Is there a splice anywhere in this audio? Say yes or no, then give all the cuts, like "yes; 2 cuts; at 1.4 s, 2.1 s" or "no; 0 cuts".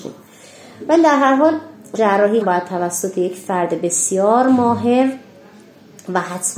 yes; 2 cuts; at 1.9 s, 2.4 s